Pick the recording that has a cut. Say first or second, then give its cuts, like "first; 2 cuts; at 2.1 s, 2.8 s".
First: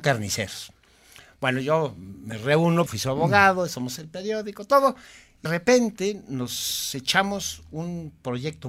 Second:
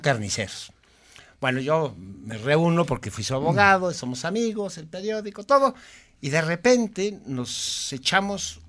first; 3 cuts; at 2.9 s, 4.0 s, 5.5 s